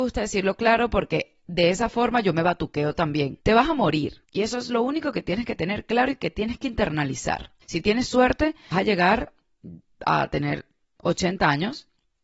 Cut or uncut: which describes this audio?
cut